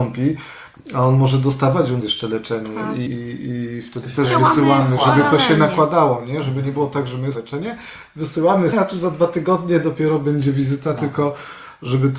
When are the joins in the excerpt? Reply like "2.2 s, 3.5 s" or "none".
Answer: 2.0 s, 3.1 s, 7.3 s, 8.7 s